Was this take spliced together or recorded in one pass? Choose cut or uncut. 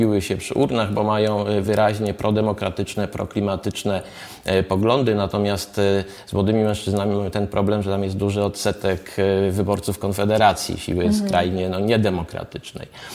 uncut